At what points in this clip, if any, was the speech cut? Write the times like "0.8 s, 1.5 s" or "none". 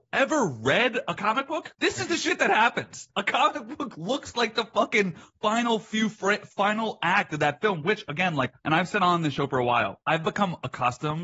3.1 s, 8.6 s